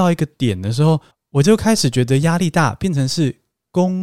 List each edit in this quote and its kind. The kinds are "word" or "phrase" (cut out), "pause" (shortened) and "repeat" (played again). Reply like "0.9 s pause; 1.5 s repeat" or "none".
1.1 s pause